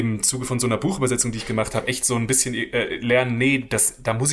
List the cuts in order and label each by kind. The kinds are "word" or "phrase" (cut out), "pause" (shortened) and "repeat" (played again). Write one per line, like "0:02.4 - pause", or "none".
none

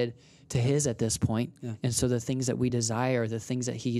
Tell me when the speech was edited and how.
none

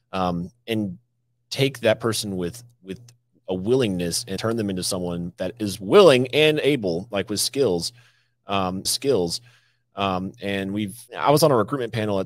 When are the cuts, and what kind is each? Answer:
0:04.4 - word
0:08.8 - repeat
0:11.1 - pause

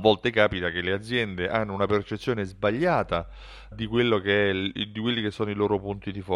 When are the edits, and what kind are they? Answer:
0:03.7 - word

